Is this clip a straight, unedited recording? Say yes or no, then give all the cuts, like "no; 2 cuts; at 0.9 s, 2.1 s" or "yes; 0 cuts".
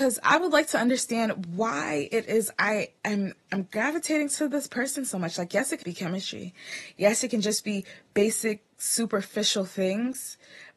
no; 2 cuts; at 5.8 s, 8.7 s